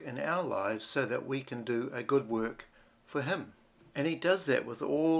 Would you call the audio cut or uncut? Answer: uncut